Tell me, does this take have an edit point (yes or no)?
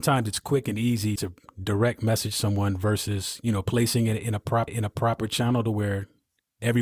yes